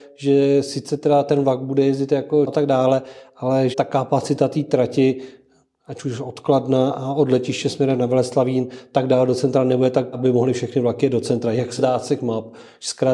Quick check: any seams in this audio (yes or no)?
yes